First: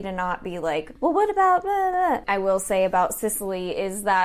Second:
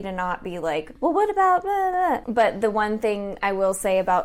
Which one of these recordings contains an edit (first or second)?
first